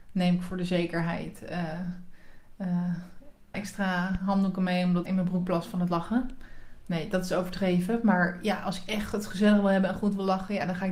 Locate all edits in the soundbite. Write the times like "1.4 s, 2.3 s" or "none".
3.5 s, 5.1 s

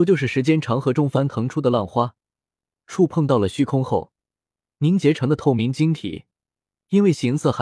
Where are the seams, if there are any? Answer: none

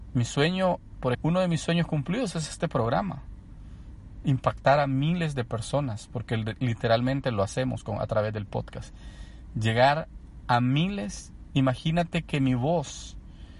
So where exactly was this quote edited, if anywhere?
1.1 s

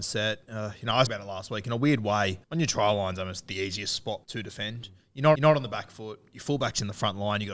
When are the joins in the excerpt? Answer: 1.1 s, 2.4 s, 4.2 s, 5.4 s

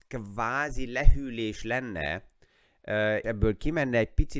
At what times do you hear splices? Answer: 3.2 s

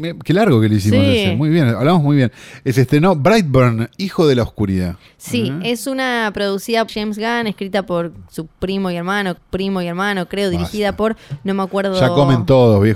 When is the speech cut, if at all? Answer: 6.9 s, 9.4 s

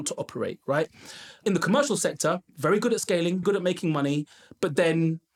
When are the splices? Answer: 1.4 s, 3.4 s

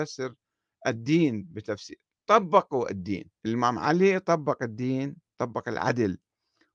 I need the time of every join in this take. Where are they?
3.4 s

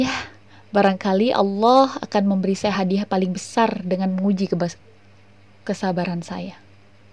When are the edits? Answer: none

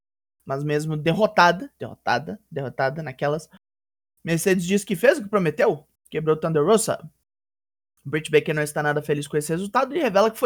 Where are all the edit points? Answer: none

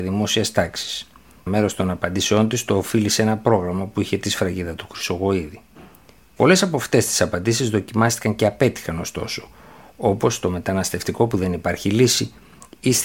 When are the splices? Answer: 1.5 s

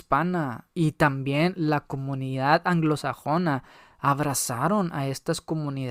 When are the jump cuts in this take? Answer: none

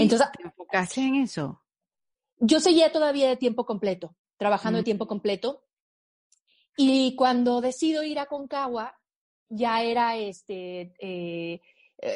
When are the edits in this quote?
none

